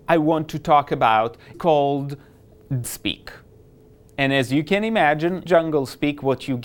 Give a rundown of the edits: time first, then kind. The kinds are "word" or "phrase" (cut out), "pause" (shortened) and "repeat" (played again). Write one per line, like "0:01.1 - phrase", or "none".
0:01.5 - word
0:02.8 - word
0:05.5 - word